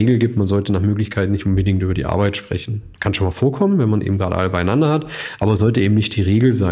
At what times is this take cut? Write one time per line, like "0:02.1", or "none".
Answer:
none